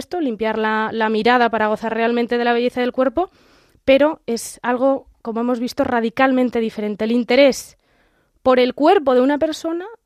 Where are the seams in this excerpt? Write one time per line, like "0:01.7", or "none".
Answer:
none